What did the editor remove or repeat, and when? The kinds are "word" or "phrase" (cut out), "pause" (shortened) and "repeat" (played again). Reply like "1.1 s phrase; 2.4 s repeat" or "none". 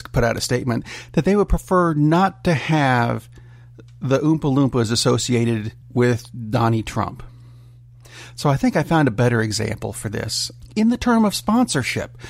5.8 s pause